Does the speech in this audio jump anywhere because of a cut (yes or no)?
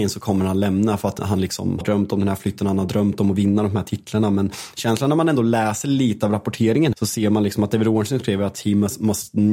yes